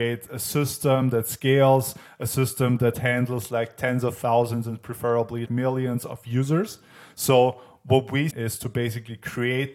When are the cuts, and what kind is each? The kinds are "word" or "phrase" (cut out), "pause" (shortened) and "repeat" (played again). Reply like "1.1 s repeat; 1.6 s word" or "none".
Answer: 5.5 s word; 8.3 s phrase

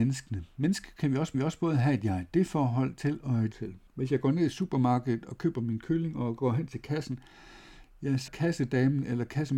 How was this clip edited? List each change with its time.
1.3 s repeat; 3.5 s word; 3.9 s pause; 8.3 s word

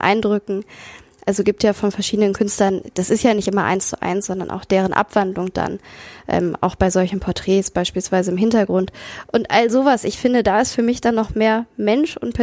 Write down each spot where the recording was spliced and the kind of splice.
none

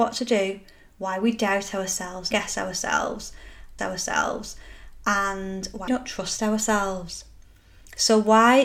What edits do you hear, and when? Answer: 2.3 s word; 3.8 s repeat; 5.9 s word

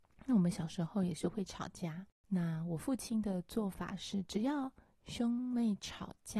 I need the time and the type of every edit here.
2.2 s pause

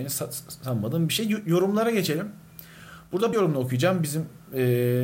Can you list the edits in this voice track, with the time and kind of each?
3.3 s word

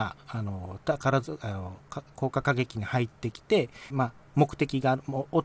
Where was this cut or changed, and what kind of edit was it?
3.9 s word

